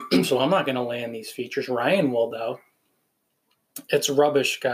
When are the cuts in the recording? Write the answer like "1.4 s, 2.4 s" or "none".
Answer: none